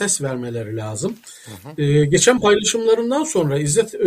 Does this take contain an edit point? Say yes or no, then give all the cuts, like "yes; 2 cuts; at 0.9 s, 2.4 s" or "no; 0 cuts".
no; 0 cuts